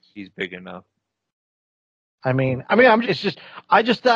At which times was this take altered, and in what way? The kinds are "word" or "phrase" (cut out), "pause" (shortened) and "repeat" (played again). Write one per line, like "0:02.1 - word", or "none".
0:03.0 - word